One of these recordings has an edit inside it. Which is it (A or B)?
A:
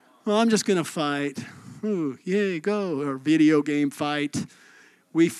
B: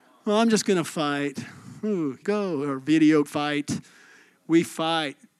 B